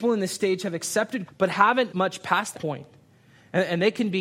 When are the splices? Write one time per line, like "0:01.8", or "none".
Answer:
0:01.3
0:01.9
0:02.5